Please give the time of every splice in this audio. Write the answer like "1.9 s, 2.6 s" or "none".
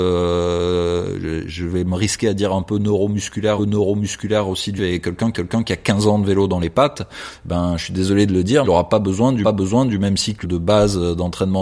3.6 s, 4.8 s, 5.3 s, 8.6 s, 9.4 s, 10.4 s